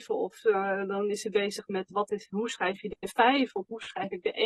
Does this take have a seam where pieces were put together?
no; 0 cuts

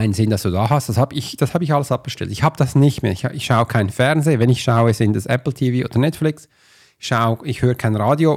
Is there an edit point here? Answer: no; 0 cuts

